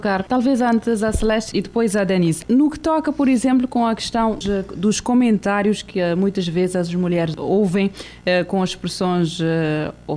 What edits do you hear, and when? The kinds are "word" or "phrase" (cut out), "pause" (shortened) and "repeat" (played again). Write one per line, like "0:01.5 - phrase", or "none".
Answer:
0:04.4 - word